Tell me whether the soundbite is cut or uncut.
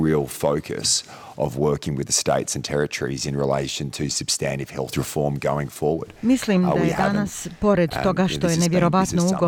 uncut